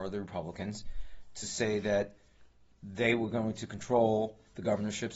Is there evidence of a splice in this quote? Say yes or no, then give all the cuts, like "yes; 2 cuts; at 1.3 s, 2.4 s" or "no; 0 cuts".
no; 0 cuts